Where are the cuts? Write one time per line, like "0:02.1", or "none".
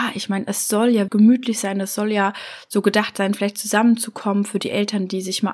0:01.1